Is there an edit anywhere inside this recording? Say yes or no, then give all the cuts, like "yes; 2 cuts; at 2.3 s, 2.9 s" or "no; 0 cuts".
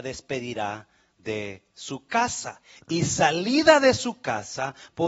no; 0 cuts